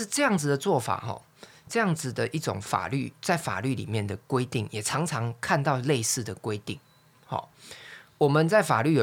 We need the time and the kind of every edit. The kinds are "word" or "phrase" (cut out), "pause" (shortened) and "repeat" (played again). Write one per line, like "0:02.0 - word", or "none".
none